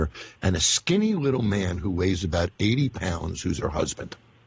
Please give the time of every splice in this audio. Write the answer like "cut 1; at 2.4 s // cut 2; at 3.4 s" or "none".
none